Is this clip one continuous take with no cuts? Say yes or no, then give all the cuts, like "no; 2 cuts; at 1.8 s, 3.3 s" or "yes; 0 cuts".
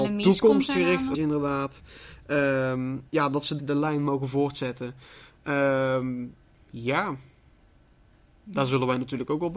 no; 4 cuts; at 1.1 s, 3.1 s, 3.6 s, 6.5 s